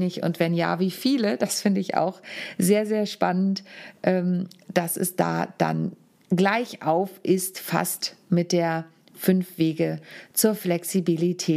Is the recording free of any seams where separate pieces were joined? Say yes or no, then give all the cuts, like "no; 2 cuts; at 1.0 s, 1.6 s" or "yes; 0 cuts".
yes; 0 cuts